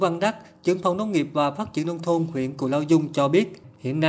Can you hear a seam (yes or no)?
no